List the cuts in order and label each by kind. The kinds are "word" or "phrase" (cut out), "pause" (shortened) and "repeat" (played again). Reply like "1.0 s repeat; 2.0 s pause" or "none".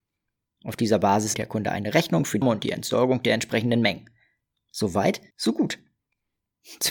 1.3 s word; 2.4 s word; 5.3 s pause

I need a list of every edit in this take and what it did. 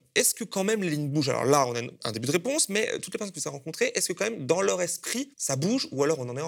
5.3 s pause

